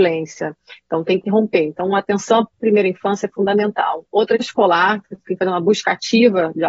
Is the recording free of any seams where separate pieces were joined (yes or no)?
no